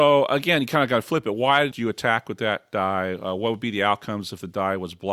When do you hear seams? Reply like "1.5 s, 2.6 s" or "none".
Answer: 1.7 s